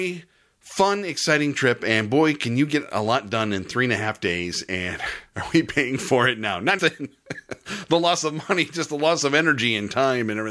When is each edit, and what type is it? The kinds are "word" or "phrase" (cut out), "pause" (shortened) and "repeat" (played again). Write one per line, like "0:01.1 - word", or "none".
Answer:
0:05.3 - pause
0:06.8 - word